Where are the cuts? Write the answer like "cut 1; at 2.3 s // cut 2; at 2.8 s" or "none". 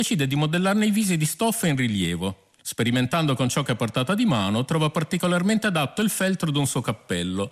cut 1; at 2.6 s

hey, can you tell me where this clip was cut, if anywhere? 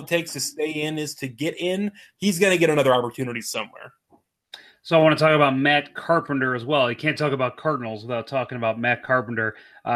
none

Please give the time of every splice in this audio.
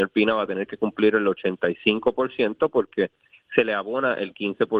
none

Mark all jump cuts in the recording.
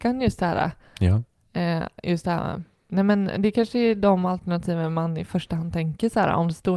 none

